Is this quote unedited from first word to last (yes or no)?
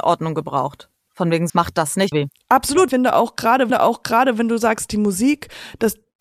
no